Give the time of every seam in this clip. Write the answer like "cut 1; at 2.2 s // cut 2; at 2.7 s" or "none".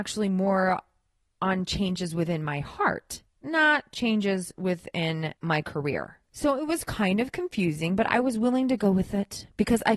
cut 1; at 3.3 s // cut 2; at 6.2 s